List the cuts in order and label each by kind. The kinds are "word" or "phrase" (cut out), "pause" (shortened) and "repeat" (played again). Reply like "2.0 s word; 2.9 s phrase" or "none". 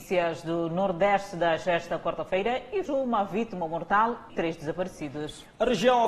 1.6 s word; 2.9 s word; 4.3 s word